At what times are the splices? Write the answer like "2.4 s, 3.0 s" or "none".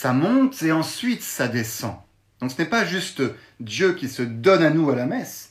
none